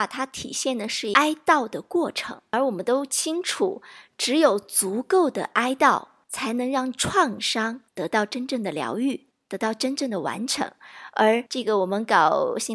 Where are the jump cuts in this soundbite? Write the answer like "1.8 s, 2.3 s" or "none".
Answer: 11.5 s